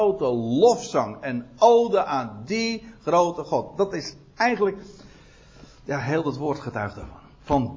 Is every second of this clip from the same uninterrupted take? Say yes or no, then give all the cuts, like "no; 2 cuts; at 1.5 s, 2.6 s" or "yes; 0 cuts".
yes; 0 cuts